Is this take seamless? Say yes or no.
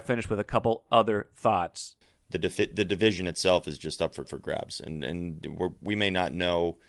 no